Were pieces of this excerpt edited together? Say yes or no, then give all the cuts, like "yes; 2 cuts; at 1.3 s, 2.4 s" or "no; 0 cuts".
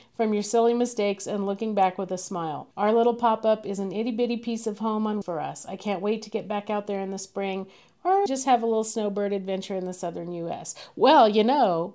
yes; 3 cuts; at 2.7 s, 5.2 s, 8.3 s